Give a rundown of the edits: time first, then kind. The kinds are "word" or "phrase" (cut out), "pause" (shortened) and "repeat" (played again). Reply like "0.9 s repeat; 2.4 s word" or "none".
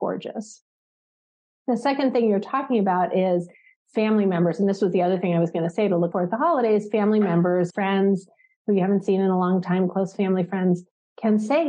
6.1 s word; 7.7 s word